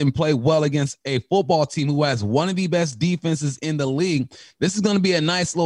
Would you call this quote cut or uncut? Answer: uncut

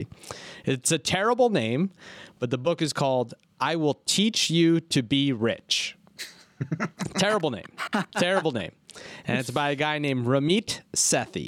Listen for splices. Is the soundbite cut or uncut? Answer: uncut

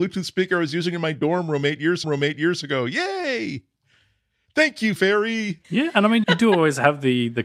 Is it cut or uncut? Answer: cut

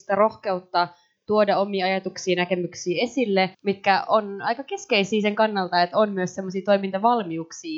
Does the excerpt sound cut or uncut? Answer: cut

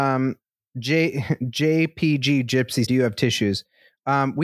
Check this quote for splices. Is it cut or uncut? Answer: cut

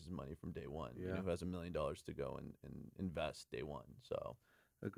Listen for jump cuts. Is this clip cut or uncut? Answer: uncut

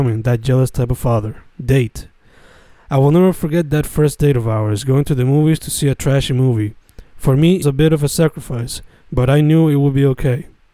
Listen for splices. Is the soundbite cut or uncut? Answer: cut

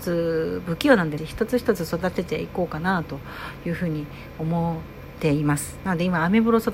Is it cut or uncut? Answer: cut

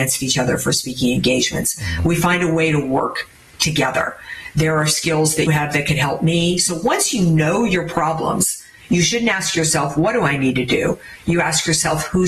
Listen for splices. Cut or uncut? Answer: cut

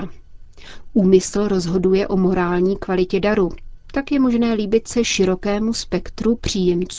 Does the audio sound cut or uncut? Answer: uncut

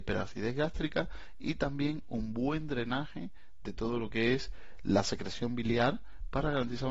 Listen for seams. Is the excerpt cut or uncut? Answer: uncut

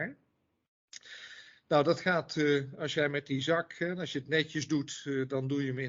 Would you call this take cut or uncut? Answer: uncut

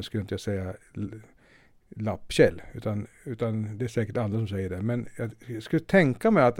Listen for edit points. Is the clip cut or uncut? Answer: uncut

